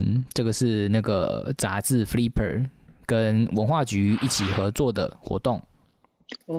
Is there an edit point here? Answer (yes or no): no